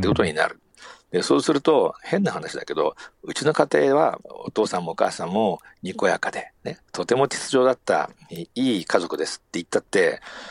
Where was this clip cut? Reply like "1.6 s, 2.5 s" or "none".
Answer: 4.2 s, 6.6 s